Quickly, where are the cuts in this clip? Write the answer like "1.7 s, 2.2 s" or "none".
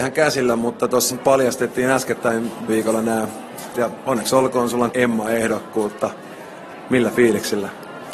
1.1 s, 2.7 s, 3.7 s, 4.9 s